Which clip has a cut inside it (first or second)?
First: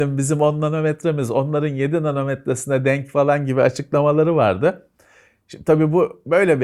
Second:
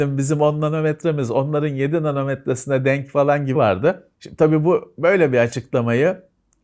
second